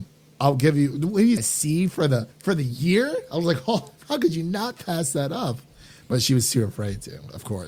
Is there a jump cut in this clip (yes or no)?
yes